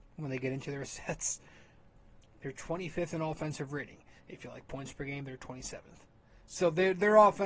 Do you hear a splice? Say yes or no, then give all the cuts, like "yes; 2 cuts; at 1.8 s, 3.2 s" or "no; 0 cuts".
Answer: yes; 1 cut; at 4.2 s